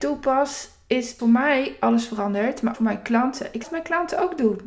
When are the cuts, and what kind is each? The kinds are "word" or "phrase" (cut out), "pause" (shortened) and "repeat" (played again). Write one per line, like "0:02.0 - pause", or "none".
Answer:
0:01.2 - word
0:02.7 - word
0:03.6 - word